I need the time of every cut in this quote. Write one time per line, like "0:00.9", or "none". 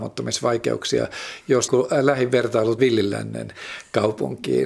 0:01.7
0:02.8